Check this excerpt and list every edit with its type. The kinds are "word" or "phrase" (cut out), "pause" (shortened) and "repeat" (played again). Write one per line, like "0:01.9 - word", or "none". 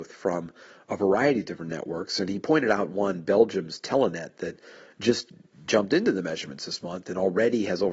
none